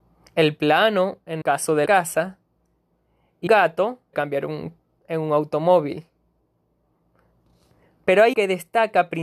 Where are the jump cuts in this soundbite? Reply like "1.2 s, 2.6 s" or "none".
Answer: 1.4 s, 1.9 s, 3.5 s, 4.1 s, 5.0 s, 8.3 s